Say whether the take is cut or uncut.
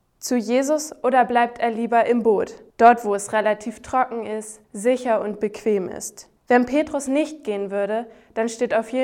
cut